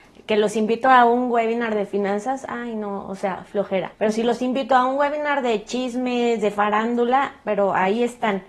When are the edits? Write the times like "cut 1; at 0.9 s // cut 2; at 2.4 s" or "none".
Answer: cut 1; at 3.9 s